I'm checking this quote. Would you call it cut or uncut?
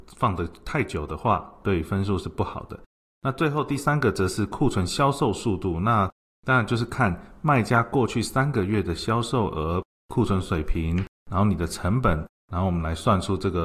uncut